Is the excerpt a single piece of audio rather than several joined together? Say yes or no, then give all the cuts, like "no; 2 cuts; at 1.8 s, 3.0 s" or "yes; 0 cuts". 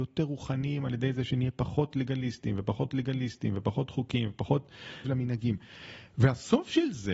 no; 2 cuts; at 2.9 s, 5.0 s